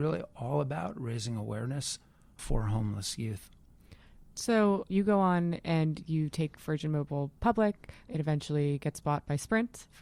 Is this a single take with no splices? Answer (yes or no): yes